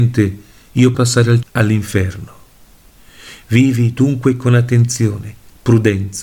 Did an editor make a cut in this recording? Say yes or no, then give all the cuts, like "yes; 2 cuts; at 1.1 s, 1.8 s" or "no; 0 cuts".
yes; 2 cuts; at 0.9 s, 1.4 s